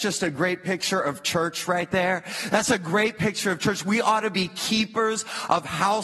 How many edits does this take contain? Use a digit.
0